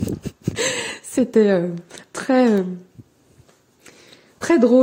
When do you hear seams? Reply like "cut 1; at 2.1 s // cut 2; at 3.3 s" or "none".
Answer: none